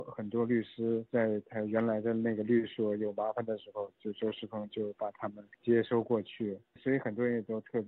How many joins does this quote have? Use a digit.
1